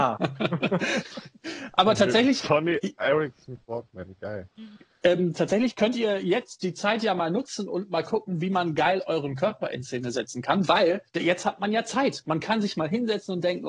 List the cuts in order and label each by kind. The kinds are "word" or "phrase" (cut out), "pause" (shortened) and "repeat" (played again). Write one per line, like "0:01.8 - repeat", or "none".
0:11.1 - pause